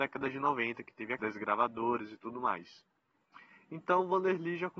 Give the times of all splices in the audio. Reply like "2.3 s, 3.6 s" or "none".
1.2 s